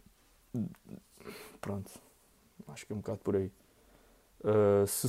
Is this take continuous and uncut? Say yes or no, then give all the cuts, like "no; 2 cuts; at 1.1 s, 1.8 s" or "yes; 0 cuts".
yes; 0 cuts